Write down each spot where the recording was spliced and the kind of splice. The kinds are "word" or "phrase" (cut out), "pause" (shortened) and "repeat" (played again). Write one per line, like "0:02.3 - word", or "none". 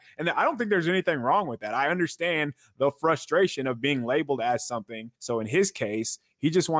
0:05.2 - pause